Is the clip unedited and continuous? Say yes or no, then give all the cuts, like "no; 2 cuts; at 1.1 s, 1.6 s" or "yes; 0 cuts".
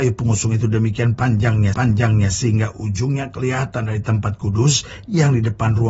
no; 1 cut; at 1.7 s